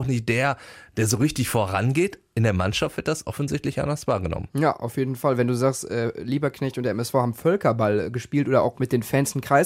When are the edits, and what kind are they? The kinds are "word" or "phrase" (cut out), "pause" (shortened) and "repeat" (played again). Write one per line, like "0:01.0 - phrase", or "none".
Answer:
none